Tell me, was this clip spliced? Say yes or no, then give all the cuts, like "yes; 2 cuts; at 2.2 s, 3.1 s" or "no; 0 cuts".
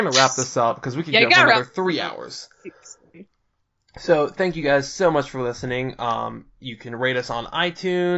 no; 0 cuts